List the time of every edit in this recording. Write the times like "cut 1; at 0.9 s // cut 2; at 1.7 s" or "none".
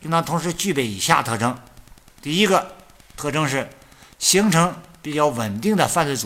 none